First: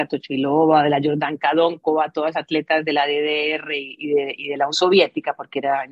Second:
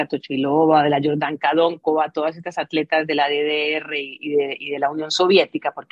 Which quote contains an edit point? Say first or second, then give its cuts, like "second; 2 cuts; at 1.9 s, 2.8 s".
first; 2 cuts; at 2.3 s, 4.7 s